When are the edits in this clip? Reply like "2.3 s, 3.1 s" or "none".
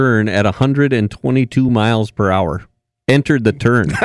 none